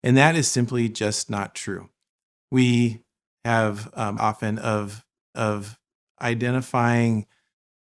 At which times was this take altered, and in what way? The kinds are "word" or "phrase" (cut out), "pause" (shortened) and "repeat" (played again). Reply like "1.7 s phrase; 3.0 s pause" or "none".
4.2 s phrase; 5.3 s repeat